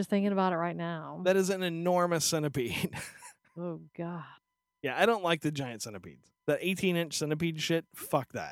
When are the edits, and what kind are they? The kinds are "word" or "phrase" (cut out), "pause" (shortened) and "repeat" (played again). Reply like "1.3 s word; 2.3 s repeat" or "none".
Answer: 6.4 s pause